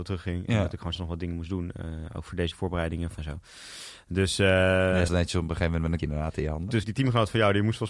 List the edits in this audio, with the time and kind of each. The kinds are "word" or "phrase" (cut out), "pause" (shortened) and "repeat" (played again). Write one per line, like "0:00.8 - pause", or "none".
0:00.9 - word
0:02.5 - word
0:03.2 - word
0:05.1 - word
0:06.0 - word
0:06.8 - word

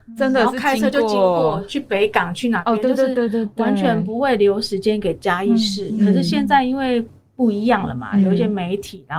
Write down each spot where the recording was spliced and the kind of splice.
none

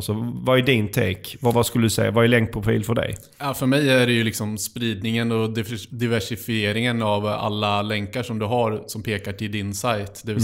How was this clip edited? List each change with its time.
0:01.5 - word

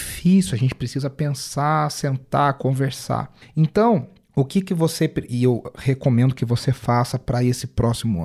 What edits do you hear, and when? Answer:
none

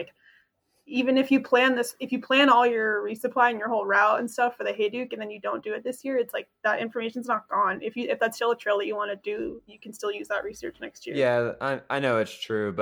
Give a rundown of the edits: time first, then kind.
none

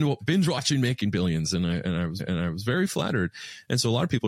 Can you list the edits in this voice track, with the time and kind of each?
0:02.2 - repeat

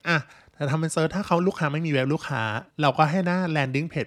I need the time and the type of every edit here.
0:02.7 - pause

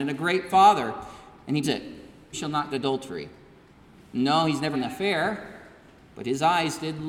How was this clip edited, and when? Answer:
0:01.6 - word
0:02.3 - phrase
0:02.7 - word
0:04.7 - word

